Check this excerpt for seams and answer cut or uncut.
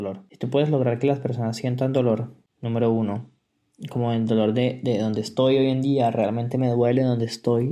uncut